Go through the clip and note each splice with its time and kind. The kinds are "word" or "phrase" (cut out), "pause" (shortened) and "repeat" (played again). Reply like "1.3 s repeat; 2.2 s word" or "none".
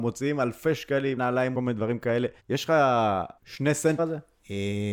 1.2 s phrase; 1.5 s phrase; 2.4 s pause; 3.4 s pause; 4.0 s phrase